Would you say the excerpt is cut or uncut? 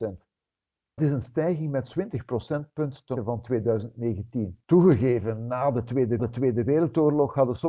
cut